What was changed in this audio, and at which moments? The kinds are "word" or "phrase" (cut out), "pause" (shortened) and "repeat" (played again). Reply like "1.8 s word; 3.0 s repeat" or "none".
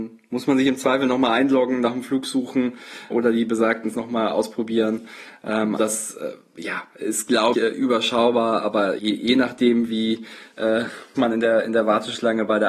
3.1 s word; 3.9 s word; 5.8 s word; 7.5 s word; 9.0 s word; 11.2 s word

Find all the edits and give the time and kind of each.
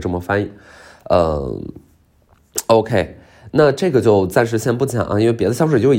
none

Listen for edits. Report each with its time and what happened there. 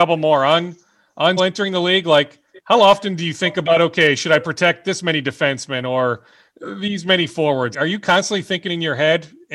1.4 s word; 7.7 s word

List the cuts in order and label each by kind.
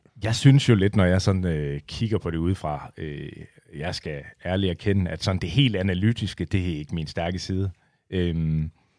none

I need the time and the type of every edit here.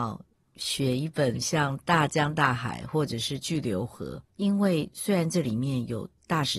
4.3 s pause

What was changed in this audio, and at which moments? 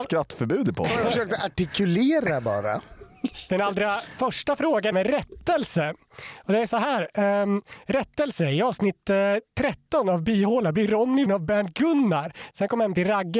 4.9 s phrase; 11.3 s word

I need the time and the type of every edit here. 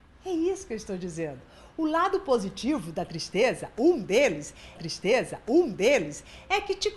4.8 s repeat

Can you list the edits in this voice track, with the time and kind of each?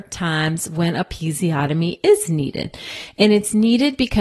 none

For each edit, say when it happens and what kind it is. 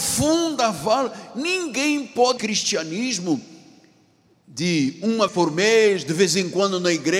2.4 s word; 5.3 s word

